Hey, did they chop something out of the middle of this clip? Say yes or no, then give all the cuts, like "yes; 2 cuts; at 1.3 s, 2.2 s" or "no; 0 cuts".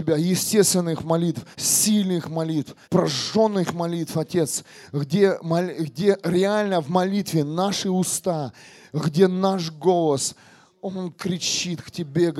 yes; 2 cuts; at 1.5 s, 2.8 s